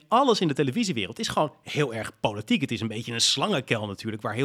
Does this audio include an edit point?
no; 0 cuts

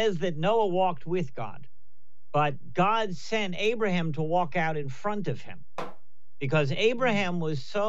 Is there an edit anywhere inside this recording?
no; 0 cuts

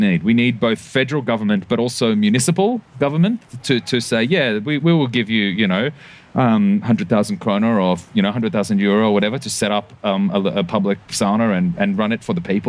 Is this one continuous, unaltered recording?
no; 1 cut; at 4.8 s

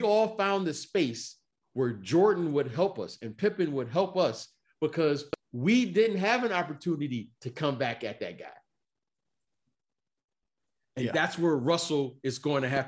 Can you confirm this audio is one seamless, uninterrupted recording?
yes; 0 cuts

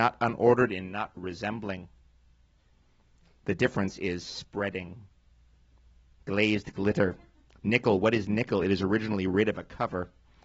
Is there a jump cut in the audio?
no; 0 cuts

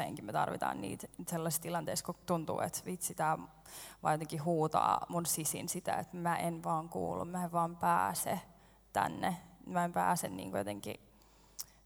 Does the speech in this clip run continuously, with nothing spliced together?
yes; 0 cuts

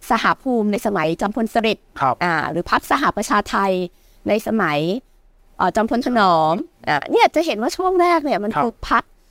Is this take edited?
no; 0 cuts

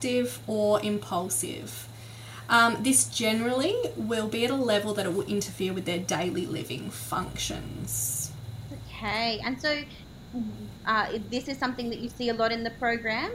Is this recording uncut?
yes; 0 cuts

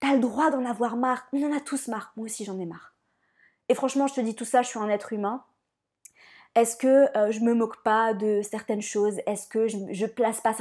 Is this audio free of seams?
yes; 0 cuts

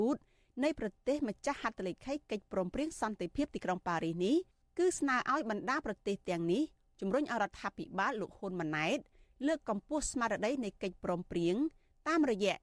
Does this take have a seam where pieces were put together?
no; 0 cuts

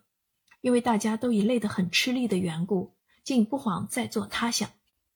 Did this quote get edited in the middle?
no; 0 cuts

